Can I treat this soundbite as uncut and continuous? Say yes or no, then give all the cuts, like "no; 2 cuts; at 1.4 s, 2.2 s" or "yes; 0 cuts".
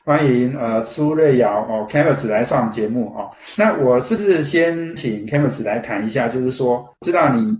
yes; 0 cuts